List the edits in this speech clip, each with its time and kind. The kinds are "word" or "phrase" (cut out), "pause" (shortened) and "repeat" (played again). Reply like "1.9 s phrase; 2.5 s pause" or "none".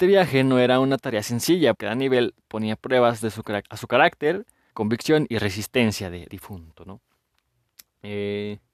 1.7 s word; 3.6 s word; 4.7 s word; 6.3 s word